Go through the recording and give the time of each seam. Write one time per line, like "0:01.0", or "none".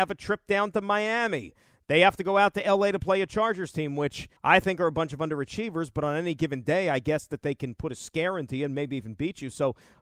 0:04.4